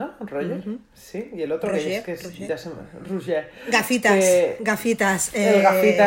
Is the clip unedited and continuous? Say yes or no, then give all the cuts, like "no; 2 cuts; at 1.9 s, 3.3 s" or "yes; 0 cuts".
yes; 0 cuts